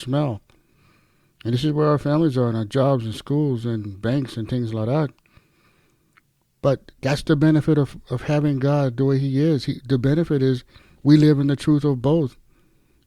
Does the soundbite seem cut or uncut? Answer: uncut